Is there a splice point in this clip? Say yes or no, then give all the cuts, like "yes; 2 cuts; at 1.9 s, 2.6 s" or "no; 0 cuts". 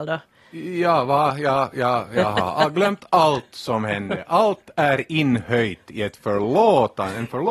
no; 0 cuts